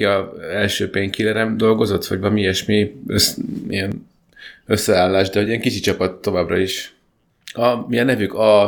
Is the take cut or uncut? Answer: uncut